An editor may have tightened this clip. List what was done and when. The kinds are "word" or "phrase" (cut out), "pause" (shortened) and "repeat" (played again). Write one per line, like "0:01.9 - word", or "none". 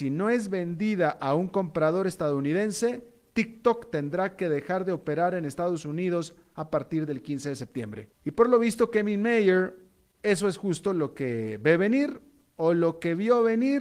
0:08.1 - pause

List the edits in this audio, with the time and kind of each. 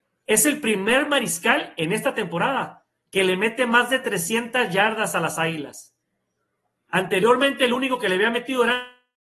none

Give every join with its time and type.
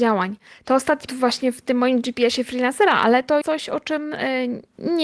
0:01.1 - word
0:03.4 - word

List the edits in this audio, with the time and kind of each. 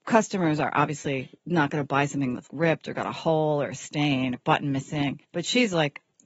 0:01.4 - pause
0:02.5 - word
0:04.3 - word
0:05.2 - pause

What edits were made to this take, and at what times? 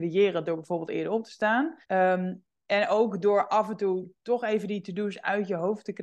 0:01.8 - pause

